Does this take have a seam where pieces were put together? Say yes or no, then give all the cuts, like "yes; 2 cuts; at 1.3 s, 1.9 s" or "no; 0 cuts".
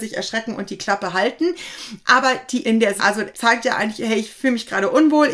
yes; 3 cuts; at 2.6 s, 3.0 s, 3.3 s